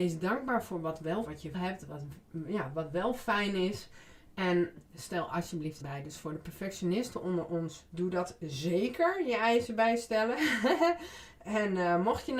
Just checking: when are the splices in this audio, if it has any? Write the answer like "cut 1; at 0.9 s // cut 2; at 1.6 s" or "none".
cut 1; at 1.2 s // cut 2; at 1.5 s // cut 3; at 5.8 s // cut 4; at 7.9 s